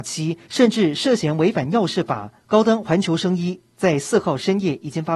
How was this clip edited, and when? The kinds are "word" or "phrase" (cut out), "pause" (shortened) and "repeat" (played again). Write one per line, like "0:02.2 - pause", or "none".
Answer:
0:02.4 - pause